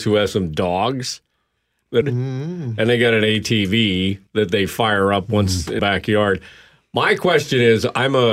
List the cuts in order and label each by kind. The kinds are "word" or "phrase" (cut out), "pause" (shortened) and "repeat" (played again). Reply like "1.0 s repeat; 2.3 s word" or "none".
2.0 s phrase; 4.3 s pause; 5.8 s word

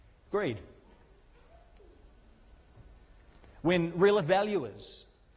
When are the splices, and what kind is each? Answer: 4.2 s word

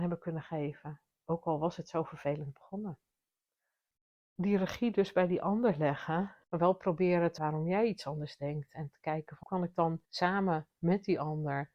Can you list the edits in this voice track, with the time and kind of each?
6.4 s pause; 7.4 s word; 9.4 s word; 10.0 s pause

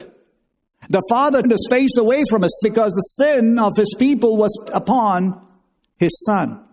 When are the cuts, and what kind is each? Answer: 1.4 s word; 2.6 s word; 4.7 s word

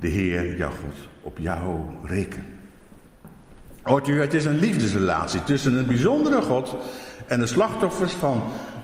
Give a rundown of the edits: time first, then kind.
none

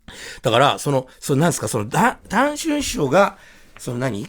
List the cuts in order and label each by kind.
1.1 s pause

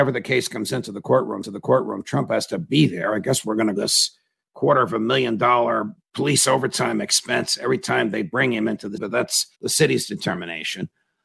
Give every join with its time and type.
1.4 s repeat; 3.7 s phrase; 5.9 s word; 9.0 s word; 9.5 s pause

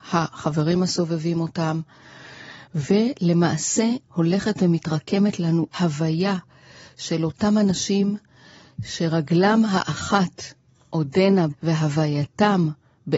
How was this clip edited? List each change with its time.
5.7 s word; 11.5 s word

